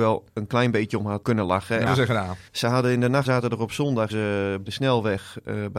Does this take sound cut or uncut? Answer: cut